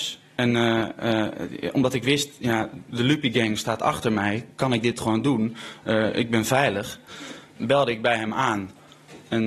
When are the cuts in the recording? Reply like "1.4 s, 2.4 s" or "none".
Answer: none